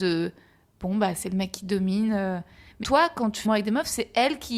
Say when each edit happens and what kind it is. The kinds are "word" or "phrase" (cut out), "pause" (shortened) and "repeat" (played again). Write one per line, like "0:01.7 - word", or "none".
0:02.8 - word
0:03.4 - word